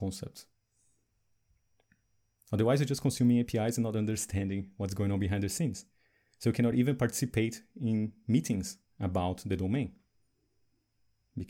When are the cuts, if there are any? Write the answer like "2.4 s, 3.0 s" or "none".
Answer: none